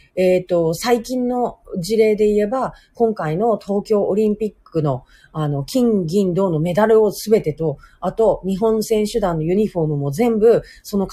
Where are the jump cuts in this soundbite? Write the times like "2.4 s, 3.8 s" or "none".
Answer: none